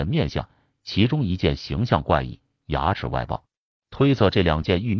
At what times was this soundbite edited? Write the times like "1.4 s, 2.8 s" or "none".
none